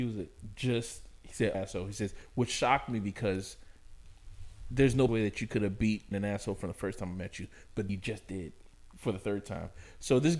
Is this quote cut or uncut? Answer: cut